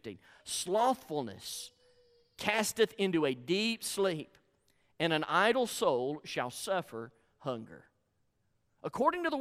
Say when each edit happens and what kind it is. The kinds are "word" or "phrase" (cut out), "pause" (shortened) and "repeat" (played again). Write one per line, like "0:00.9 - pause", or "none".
none